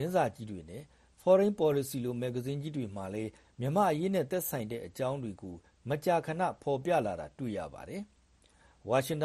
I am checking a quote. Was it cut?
no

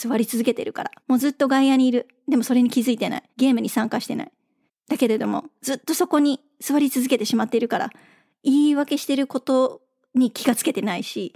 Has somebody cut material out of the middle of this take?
yes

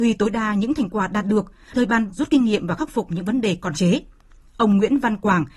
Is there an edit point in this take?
yes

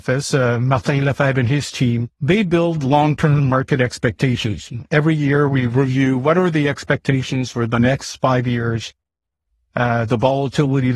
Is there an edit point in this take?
yes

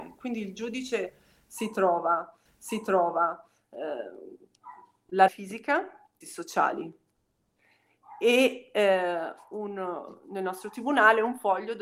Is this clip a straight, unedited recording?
no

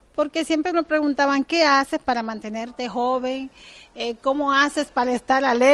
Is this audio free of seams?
yes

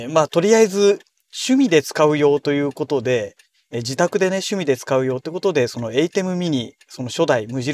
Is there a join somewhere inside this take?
no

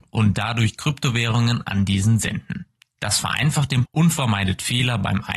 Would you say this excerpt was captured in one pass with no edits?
no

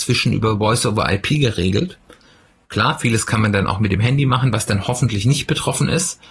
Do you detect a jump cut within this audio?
no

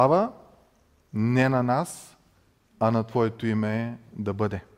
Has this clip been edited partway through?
no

